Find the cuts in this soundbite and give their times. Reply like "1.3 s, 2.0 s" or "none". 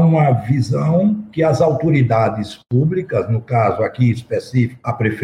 none